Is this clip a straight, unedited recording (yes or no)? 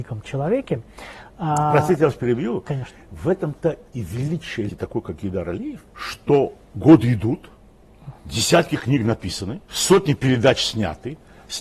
no